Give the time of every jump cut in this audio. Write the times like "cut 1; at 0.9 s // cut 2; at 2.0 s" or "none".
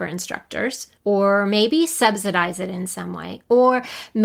cut 1; at 1.0 s